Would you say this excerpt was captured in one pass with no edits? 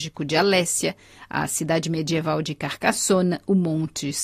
yes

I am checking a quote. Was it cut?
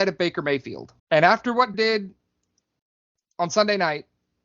yes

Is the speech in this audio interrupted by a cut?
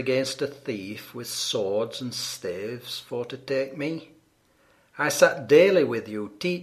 no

